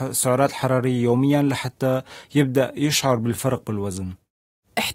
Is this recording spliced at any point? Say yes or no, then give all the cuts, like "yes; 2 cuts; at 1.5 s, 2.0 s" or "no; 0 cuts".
no; 0 cuts